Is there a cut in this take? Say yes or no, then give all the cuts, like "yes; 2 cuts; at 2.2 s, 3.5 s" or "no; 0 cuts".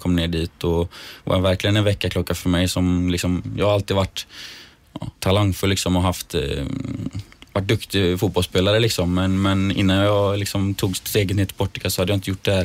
yes; 1 cut; at 5.2 s